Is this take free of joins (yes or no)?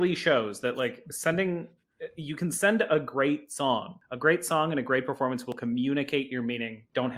yes